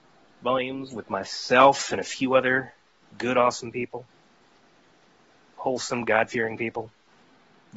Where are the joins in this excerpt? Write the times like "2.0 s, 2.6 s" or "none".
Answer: none